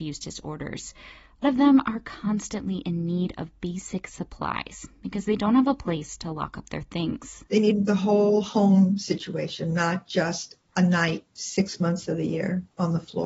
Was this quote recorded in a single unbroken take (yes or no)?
no